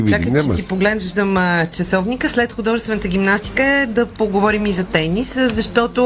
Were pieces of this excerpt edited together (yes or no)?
no